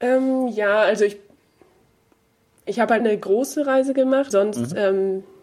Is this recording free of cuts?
no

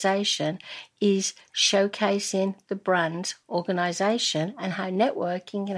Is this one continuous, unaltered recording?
yes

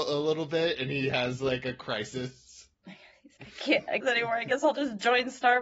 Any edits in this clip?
yes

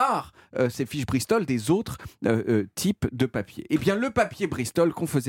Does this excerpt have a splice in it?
no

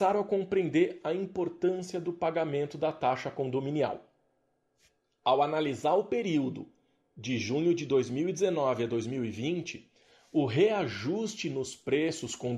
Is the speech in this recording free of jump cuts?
yes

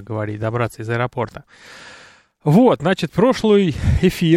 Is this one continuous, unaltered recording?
yes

